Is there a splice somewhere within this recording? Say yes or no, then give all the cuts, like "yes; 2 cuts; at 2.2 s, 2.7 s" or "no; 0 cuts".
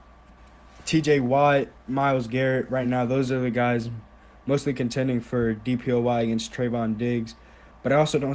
no; 0 cuts